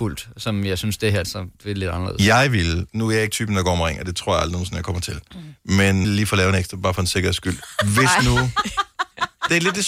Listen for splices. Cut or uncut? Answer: cut